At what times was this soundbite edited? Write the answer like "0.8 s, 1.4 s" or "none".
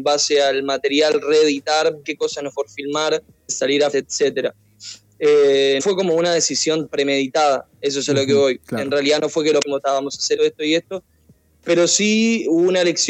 2.0 s, 2.5 s, 3.5 s, 3.9 s, 5.8 s, 6.9 s, 9.6 s, 10.4 s